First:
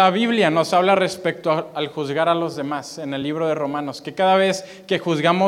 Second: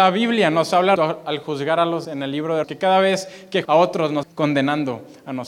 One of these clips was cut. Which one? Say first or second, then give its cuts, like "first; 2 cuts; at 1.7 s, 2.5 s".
second; 5 cuts; at 1.0 s, 2.0 s, 2.6 s, 3.6 s, 4.2 s